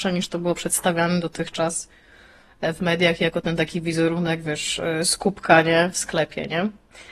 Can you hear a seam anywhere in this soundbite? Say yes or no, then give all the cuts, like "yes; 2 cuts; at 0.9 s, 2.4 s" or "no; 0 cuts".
no; 0 cuts